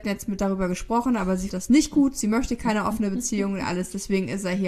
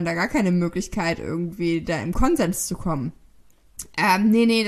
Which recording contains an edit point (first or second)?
first